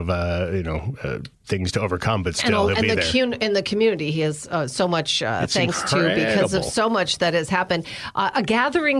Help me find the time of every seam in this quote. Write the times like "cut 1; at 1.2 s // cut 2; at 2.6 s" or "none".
none